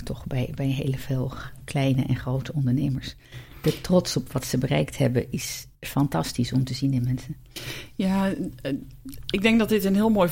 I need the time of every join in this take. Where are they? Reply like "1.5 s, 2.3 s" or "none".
5.7 s